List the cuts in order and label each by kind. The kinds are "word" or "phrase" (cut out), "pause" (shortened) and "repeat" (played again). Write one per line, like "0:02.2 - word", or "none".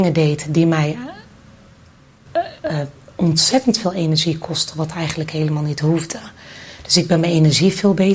none

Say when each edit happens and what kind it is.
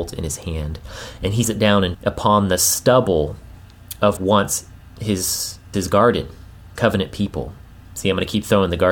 0:01.4 - word
0:01.9 - word
0:04.2 - word
0:05.7 - word
0:06.8 - word

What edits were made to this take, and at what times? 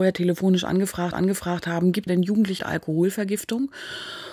0:01.1 - repeat
0:02.1 - word
0:02.6 - word

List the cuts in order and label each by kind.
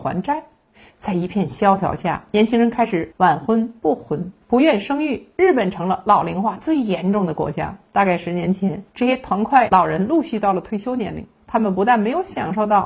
0:04.4 - pause
0:07.9 - pause
0:08.9 - pause

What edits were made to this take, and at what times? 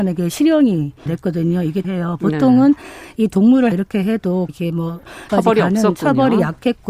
0:01.1 - word
0:01.8 - phrase
0:03.7 - word
0:04.5 - word
0:05.3 - word

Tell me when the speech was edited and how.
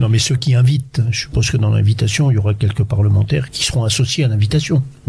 0:03.5 - word

